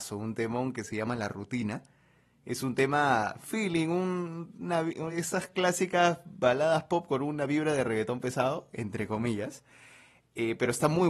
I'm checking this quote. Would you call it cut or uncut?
uncut